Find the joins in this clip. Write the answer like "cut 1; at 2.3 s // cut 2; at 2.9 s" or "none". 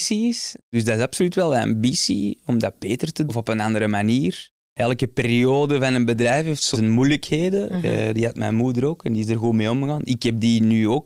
cut 1; at 3.3 s // cut 2; at 4.6 s // cut 3; at 6.7 s